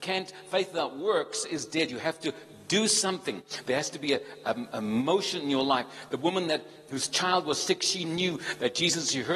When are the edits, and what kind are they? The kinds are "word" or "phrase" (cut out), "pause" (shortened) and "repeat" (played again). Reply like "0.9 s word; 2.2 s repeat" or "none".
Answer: none